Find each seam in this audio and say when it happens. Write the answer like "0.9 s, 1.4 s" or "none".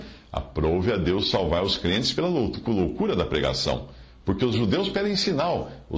none